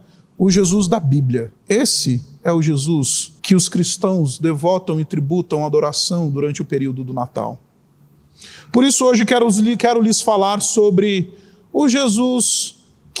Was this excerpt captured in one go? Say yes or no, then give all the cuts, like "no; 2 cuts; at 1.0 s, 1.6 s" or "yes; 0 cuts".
no; 2 cuts; at 1.6 s, 3.4 s